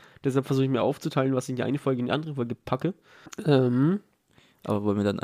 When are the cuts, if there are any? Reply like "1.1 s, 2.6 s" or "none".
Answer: 3.3 s